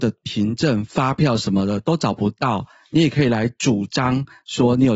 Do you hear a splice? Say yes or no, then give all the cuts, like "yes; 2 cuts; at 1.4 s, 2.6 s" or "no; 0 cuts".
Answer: no; 0 cuts